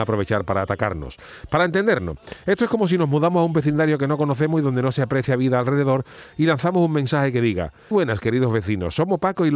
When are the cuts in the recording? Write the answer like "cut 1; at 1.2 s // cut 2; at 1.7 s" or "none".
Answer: cut 1; at 7.9 s

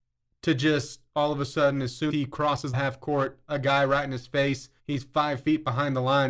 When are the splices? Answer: cut 1; at 2.1 s // cut 2; at 2.7 s // cut 3; at 4.8 s

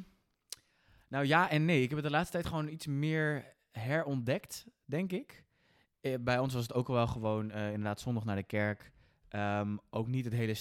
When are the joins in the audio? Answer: none

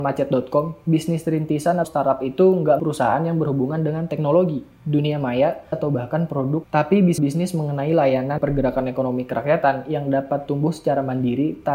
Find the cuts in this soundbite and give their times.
cut 1; at 1.8 s // cut 2; at 2.8 s // cut 3; at 5.7 s // cut 4; at 6.6 s // cut 5; at 7.2 s // cut 6; at 8.4 s

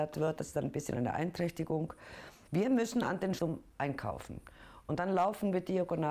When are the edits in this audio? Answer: cut 1; at 3.4 s

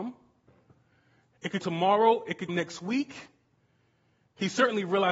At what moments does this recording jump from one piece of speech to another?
cut 1; at 1.6 s // cut 2; at 2.5 s

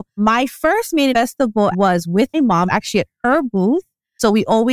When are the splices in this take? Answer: cut 1; at 1.1 s // cut 2; at 1.7 s // cut 3; at 2.3 s // cut 4; at 2.7 s

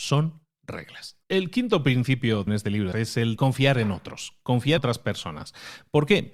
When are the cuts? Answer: cut 1; at 1.2 s // cut 2; at 2.5 s // cut 3; at 2.9 s // cut 4; at 3.4 s // cut 5; at 4.8 s

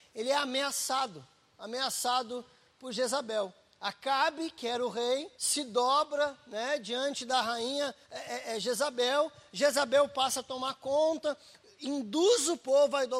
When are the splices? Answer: cut 1; at 5.3 s // cut 2; at 8.0 s

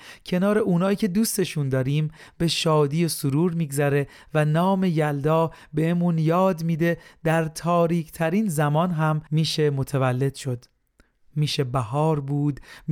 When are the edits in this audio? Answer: cut 1; at 9.3 s

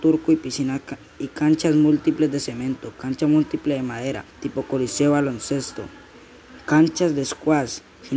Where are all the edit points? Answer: cut 1; at 4.3 s

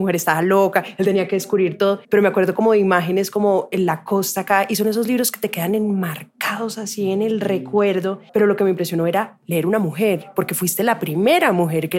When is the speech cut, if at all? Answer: cut 1; at 2.0 s // cut 2; at 8.3 s

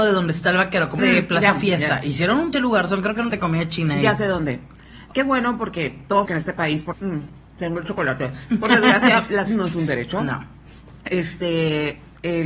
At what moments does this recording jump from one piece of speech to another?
cut 1; at 1.0 s // cut 2; at 2.5 s // cut 3; at 3.3 s // cut 4; at 5.1 s // cut 5; at 6.3 s // cut 6; at 6.9 s // cut 7; at 9.5 s

